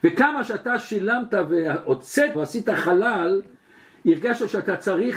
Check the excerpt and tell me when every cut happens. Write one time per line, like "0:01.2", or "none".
0:02.3